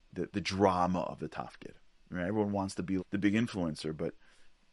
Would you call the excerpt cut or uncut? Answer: cut